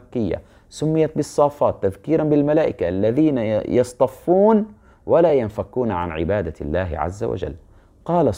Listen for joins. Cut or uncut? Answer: uncut